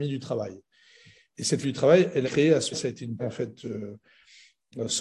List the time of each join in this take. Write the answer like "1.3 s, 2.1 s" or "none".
1.6 s, 2.2 s, 2.7 s, 3.2 s

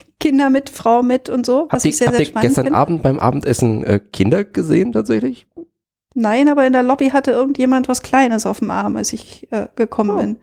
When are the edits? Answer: none

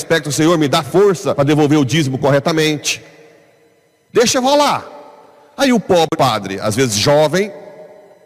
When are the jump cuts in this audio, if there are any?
1.4 s, 6.1 s

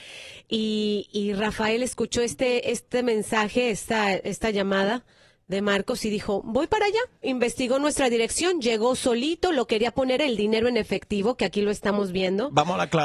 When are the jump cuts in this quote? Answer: 10.2 s

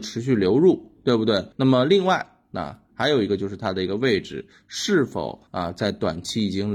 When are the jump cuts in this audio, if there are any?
1.5 s, 5.5 s

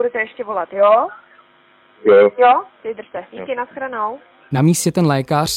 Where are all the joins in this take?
none

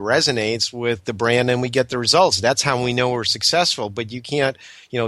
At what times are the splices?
none

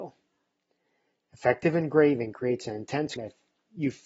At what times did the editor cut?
3.2 s

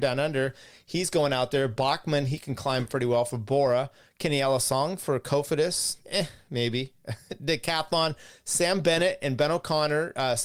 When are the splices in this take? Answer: none

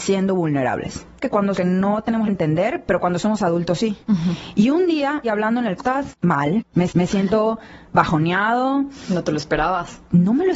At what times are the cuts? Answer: 1.2 s, 1.6 s, 2.3 s, 4.0 s, 5.2 s, 5.8 s, 6.9 s

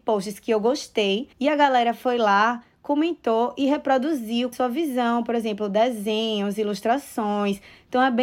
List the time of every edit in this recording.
1.3 s, 4.5 s

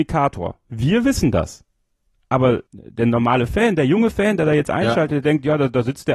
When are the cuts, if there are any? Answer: 2.7 s

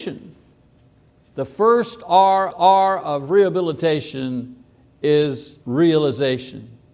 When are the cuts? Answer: 2.5 s, 5.6 s

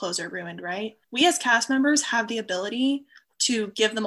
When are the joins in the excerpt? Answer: 1.0 s

